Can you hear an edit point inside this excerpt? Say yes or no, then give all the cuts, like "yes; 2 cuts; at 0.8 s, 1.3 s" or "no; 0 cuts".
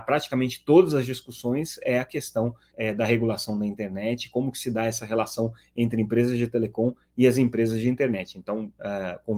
yes; 1 cut; at 2.7 s